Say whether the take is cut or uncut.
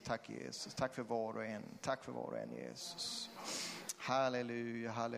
uncut